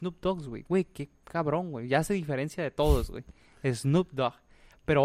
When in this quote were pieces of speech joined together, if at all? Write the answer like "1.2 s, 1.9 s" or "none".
none